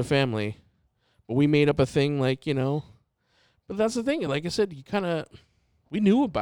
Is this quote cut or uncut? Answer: uncut